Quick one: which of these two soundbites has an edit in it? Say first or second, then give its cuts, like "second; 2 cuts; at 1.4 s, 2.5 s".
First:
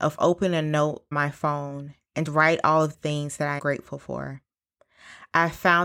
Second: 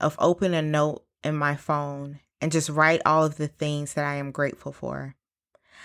first; 4 cuts; at 1.1 s, 2.3 s, 2.9 s, 3.6 s